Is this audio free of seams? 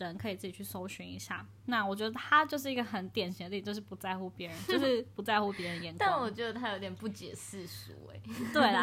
yes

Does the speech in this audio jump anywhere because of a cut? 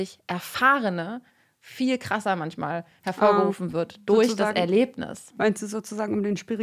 no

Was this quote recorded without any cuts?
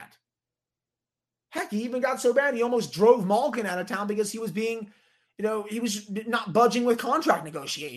yes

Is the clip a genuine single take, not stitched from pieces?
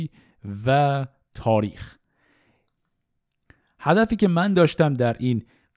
yes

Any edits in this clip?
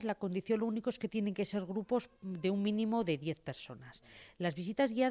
no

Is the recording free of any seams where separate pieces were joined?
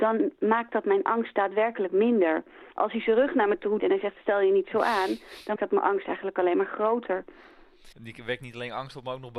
no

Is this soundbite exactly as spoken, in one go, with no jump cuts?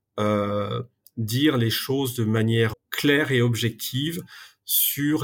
no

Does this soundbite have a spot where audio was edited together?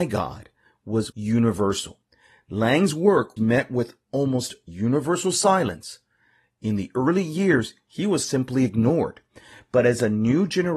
yes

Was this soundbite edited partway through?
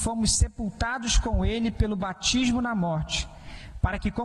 no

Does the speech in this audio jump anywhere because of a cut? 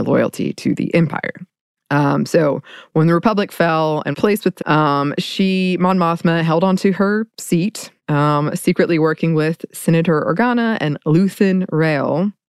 yes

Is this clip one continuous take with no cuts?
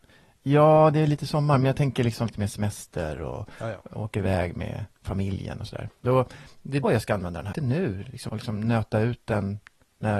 no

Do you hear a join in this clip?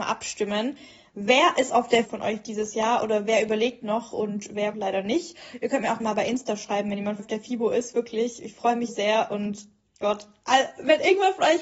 yes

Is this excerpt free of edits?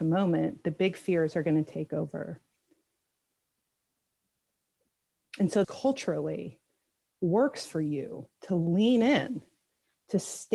no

